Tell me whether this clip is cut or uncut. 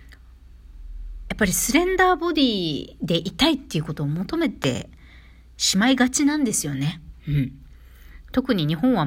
uncut